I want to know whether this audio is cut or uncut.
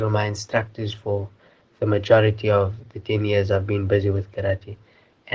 uncut